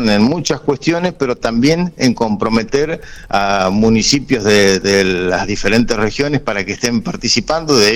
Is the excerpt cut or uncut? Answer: uncut